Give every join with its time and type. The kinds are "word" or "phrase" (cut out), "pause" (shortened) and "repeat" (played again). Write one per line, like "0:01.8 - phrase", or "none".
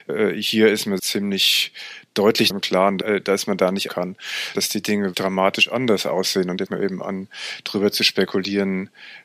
0:01.0 - word
0:02.5 - word
0:03.9 - word
0:04.5 - word
0:05.1 - word
0:06.7 - word